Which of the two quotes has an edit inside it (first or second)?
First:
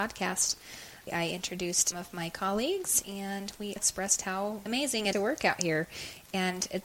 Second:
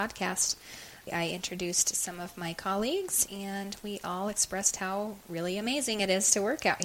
first